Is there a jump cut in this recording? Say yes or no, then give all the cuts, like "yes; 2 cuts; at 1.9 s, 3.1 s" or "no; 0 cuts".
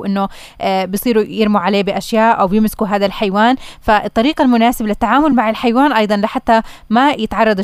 no; 0 cuts